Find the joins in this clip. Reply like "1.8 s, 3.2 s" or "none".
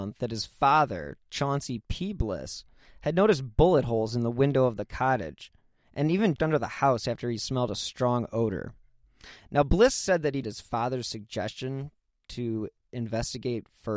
6.4 s, 10.4 s